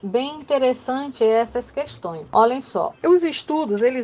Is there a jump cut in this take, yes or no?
no